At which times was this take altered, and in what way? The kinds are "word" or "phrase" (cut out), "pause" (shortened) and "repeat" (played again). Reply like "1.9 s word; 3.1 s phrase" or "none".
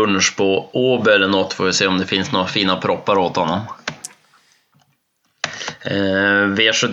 none